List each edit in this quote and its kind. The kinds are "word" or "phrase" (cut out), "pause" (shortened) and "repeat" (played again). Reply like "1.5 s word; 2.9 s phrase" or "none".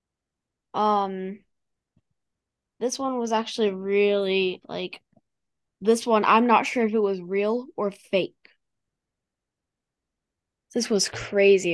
none